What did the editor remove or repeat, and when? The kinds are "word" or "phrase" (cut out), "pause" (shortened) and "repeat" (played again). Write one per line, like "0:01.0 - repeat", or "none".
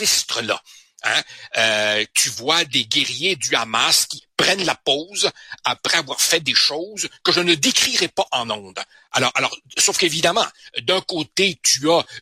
0:08.9 - pause